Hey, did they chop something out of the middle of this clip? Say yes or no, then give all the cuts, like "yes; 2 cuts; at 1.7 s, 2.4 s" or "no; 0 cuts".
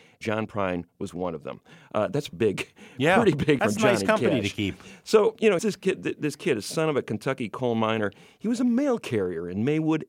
yes; 3 cuts; at 2.3 s, 3.6 s, 5.6 s